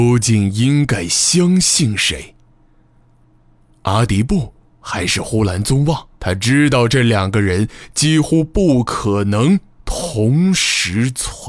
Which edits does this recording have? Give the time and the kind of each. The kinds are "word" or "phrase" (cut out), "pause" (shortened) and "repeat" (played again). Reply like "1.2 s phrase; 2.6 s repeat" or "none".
4.7 s pause; 6.2 s pause

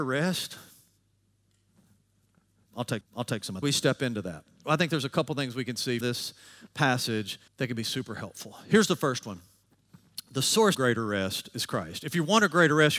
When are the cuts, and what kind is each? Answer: 3.0 s repeat; 3.6 s phrase; 6.0 s word; 7.5 s pause; 10.7 s word

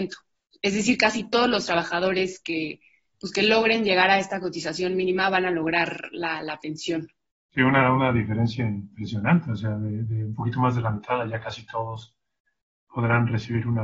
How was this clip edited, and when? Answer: none

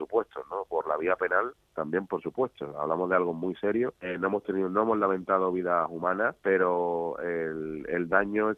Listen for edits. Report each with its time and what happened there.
4.0 s pause; 6.4 s pause

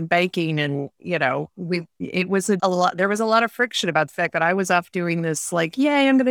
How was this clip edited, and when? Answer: 2.6 s word

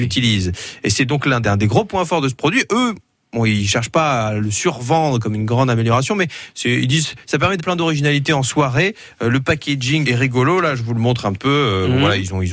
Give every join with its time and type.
1.4 s word; 7.6 s word; 10.0 s word; 11.3 s word

